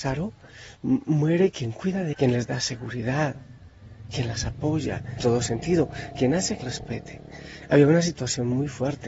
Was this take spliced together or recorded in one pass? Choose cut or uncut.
cut